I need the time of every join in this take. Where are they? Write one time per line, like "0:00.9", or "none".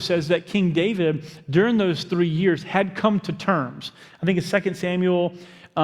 none